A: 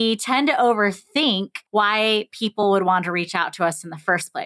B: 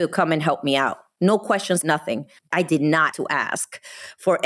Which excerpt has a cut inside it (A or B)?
B